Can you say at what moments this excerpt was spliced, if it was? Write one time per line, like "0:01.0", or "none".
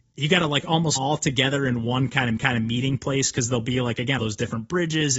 0:01.0
0:02.4
0:04.2